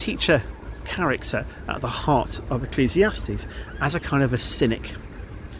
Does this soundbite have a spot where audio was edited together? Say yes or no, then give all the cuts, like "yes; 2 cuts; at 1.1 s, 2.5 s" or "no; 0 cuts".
no; 0 cuts